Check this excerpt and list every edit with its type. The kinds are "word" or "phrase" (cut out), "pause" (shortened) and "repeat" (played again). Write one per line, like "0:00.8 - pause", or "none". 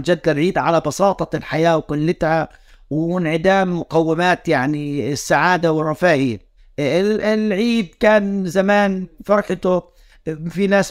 0:06.6 - pause